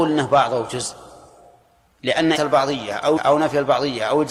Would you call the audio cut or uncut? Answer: cut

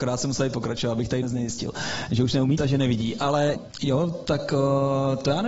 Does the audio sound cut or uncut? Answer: cut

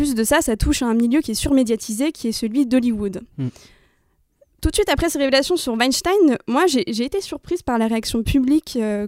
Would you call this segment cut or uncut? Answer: cut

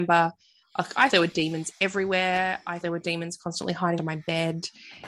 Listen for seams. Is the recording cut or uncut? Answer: cut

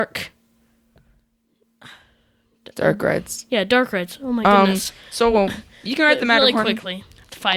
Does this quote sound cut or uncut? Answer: uncut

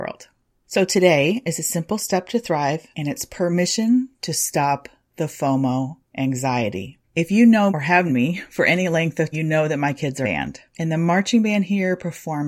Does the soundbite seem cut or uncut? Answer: cut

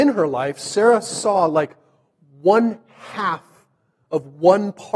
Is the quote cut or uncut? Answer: uncut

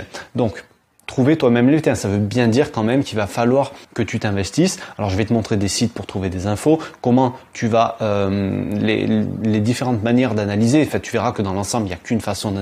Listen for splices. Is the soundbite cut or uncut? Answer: cut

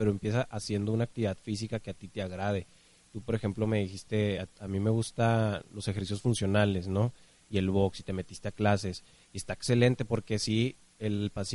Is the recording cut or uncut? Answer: uncut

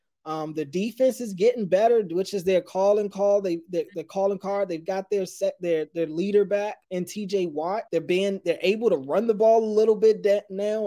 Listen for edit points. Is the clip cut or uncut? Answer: cut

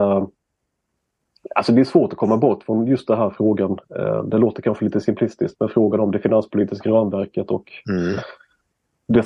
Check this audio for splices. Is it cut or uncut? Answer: uncut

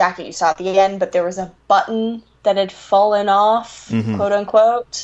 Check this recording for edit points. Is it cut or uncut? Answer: uncut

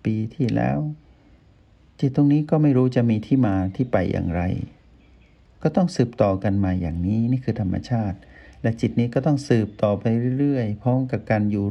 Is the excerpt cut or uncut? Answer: uncut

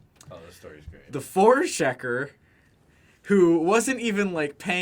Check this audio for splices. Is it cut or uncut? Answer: uncut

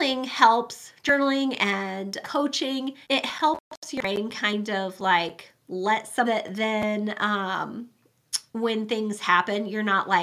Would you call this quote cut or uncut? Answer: cut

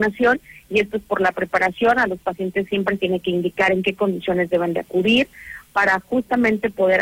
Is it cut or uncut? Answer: cut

